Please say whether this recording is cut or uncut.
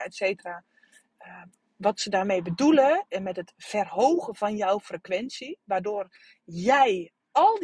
uncut